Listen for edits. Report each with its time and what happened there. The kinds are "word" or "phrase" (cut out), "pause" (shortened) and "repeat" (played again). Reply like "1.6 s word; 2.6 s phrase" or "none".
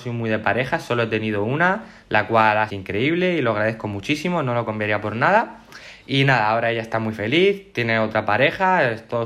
2.7 s phrase